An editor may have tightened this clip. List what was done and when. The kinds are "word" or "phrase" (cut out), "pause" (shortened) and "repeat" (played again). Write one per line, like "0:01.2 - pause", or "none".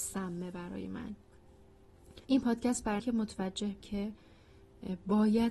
0:02.2 - pause
0:03.0 - word
0:03.8 - word